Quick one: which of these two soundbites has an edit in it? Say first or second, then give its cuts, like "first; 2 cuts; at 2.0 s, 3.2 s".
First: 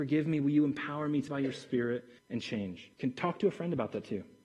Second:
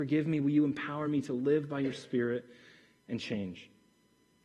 first; 3 cuts; at 1.3 s, 2.2 s, 2.9 s